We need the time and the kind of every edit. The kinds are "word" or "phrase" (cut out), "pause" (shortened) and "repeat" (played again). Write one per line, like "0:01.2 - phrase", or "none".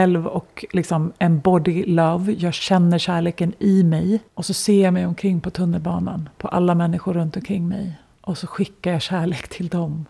0:04.3 - pause